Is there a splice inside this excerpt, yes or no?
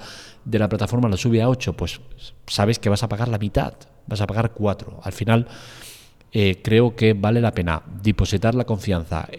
no